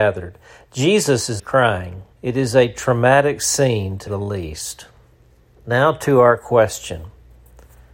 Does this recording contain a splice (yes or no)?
yes